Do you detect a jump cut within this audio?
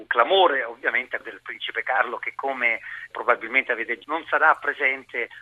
yes; 3 cuts; at 1.2 s, 3.1 s, 4.0 s

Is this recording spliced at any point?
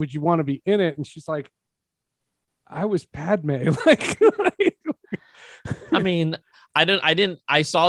no; 0 cuts

